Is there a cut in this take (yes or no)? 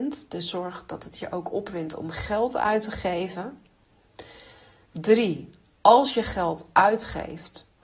no